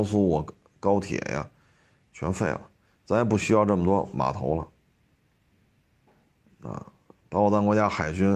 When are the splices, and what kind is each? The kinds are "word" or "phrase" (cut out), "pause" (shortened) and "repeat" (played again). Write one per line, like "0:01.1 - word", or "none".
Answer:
none